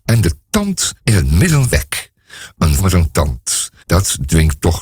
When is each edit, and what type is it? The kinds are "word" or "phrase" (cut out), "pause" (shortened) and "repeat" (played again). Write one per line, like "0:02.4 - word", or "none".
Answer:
0:01.0 - pause
0:01.7 - phrase
0:02.8 - word
0:03.8 - pause